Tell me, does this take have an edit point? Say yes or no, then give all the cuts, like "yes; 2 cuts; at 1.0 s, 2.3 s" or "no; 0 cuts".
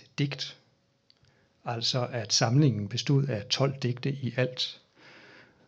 no; 0 cuts